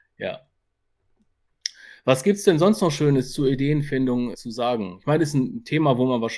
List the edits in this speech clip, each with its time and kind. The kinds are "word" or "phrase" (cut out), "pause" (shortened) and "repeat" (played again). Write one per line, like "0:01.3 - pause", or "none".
0:04.3 - word